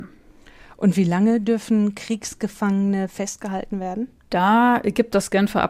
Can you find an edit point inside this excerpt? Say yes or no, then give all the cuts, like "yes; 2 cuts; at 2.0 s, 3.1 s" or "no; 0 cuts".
no; 0 cuts